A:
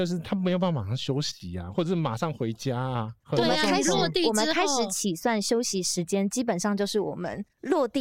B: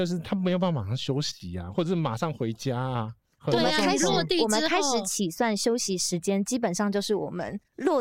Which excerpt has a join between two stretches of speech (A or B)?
A